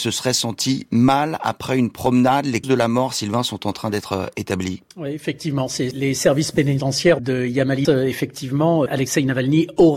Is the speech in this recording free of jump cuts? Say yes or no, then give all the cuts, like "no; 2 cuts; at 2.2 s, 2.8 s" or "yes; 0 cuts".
no; 6 cuts; at 2.6 s, 4.9 s, 5.9 s, 7.2 s, 7.8 s, 8.9 s